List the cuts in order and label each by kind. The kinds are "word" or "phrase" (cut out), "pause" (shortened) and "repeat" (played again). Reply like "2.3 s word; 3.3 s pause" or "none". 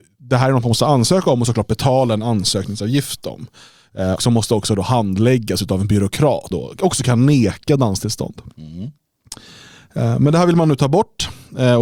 4.2 s word; 6.5 s word